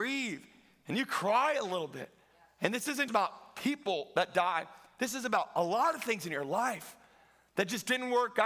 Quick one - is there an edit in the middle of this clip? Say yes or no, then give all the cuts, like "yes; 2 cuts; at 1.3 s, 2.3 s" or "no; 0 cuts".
yes; 1 cut; at 3.1 s